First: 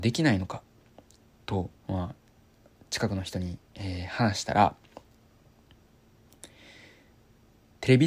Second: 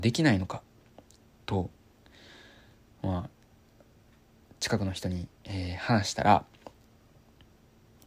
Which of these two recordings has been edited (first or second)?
first